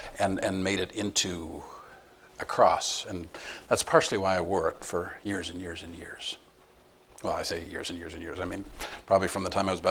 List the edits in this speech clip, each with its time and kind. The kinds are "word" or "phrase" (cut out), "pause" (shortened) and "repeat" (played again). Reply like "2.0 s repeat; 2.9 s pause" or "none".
none